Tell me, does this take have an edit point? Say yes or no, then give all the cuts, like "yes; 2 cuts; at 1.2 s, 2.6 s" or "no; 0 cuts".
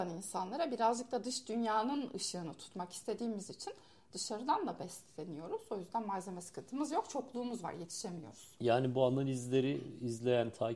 no; 0 cuts